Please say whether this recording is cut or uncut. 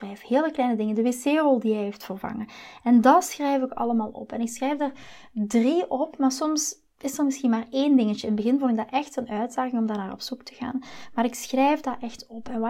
uncut